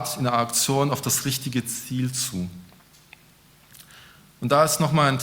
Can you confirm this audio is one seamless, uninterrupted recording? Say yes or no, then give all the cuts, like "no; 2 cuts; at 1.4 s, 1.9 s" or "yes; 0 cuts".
yes; 0 cuts